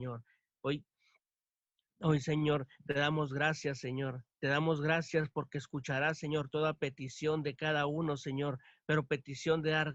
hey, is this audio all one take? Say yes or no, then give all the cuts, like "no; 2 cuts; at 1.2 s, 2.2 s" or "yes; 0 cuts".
yes; 0 cuts